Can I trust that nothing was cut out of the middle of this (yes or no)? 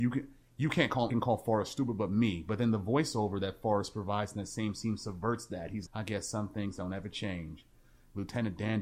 no